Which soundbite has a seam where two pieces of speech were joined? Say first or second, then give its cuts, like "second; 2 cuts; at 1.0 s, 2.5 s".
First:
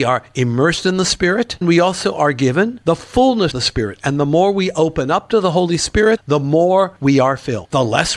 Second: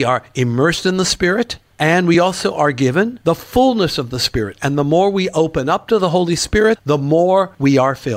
first; 2 cuts; at 1.6 s, 3.5 s